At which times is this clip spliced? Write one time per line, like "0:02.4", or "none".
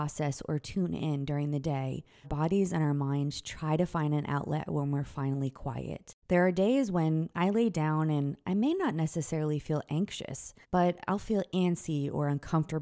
0:02.2
0:06.2
0:10.6